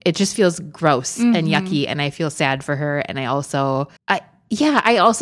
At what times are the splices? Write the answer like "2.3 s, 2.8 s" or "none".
4.0 s